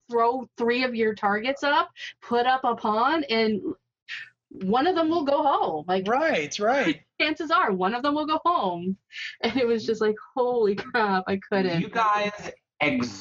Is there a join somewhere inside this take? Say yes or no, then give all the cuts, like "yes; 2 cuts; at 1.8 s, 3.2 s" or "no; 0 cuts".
no; 0 cuts